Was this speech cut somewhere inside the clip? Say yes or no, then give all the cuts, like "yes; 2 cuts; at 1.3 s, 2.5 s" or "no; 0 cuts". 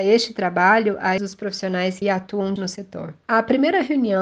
yes; 3 cuts; at 1.2 s, 2.0 s, 2.6 s